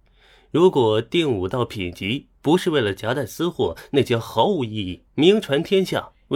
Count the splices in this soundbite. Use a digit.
1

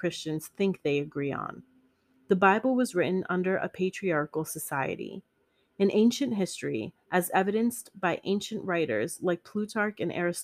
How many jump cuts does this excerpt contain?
0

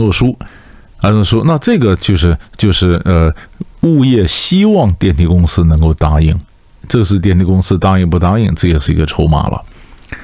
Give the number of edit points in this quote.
1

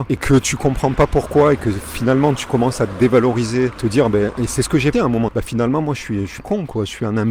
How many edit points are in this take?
4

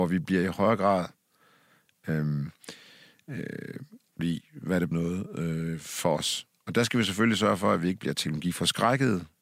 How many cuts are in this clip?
2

